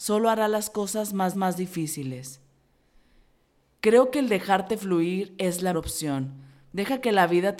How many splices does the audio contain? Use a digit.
2